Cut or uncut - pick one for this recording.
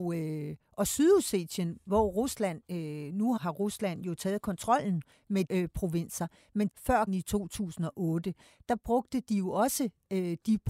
cut